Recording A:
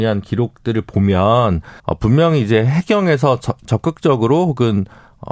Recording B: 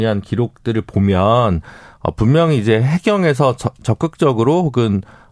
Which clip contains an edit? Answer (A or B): A